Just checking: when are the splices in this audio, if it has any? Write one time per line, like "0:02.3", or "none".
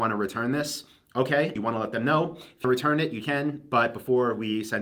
0:01.6
0:02.6
0:03.2